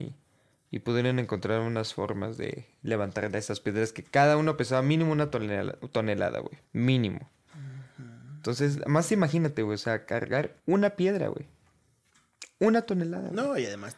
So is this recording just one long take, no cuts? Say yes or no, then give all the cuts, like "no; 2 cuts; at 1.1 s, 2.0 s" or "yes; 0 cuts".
no; 2 cuts; at 6.6 s, 10.6 s